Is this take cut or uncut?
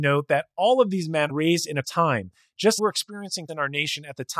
cut